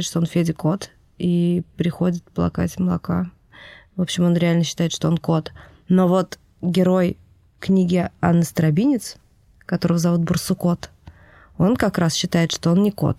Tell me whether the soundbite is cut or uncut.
uncut